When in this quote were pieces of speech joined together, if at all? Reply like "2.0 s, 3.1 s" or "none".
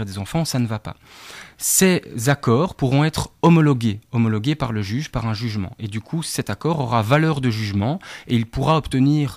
none